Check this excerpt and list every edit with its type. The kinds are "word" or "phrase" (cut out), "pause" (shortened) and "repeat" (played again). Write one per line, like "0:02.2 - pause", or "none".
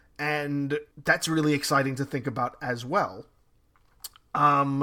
0:00.9 - pause